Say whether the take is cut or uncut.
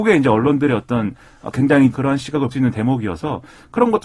cut